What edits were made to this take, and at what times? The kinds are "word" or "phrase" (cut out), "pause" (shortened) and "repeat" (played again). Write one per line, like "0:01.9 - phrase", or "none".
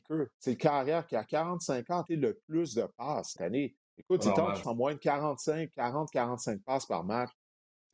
0:02.1 - word
0:03.4 - phrase
0:03.9 - pause
0:04.6 - word